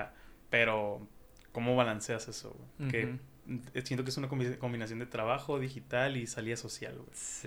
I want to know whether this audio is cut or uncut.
uncut